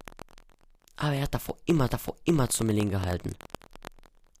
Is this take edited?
yes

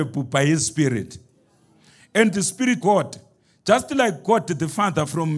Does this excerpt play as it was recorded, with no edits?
no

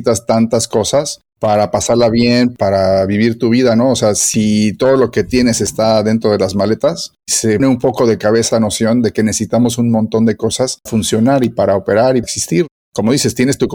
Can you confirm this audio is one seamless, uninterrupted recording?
no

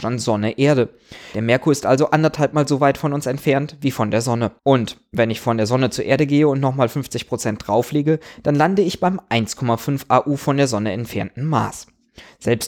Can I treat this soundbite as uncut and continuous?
no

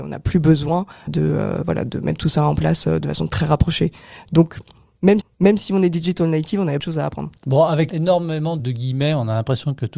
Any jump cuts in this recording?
yes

